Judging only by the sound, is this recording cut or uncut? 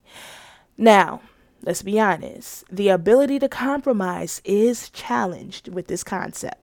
uncut